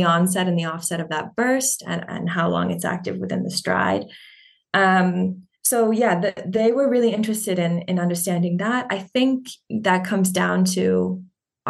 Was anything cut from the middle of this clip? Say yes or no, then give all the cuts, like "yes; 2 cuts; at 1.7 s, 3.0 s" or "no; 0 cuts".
yes; 1 cut; at 5.6 s